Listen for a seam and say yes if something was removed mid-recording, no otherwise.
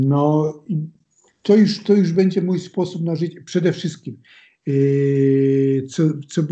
no